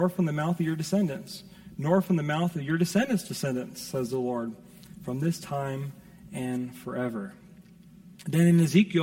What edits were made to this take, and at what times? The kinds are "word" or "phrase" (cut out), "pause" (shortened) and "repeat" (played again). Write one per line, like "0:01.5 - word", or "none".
none